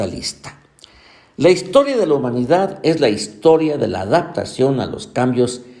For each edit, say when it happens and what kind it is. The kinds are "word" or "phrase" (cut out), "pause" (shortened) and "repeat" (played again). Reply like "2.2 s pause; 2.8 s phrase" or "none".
none